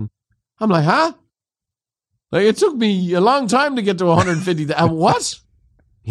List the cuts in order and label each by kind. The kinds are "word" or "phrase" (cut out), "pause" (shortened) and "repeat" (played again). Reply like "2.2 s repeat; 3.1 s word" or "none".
none